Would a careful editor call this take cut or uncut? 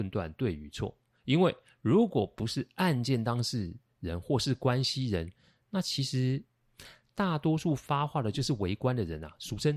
uncut